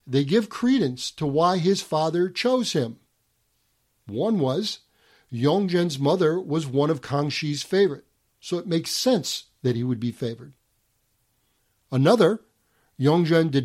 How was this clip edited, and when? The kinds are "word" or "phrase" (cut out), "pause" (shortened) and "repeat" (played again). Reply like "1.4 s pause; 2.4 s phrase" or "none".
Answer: 8.2 s pause